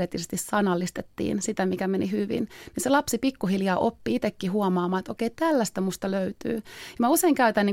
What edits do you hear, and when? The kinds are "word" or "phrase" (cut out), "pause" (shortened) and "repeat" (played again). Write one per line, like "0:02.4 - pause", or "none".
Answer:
none